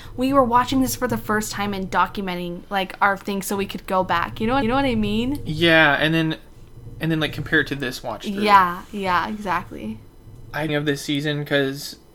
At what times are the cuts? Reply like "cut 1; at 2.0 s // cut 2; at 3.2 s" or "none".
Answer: cut 1; at 4.6 s // cut 2; at 10.7 s